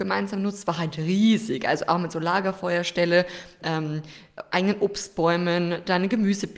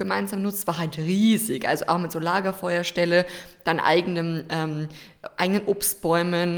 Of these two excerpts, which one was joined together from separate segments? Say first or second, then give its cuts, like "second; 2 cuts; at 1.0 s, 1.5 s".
first; 1 cut; at 3.6 s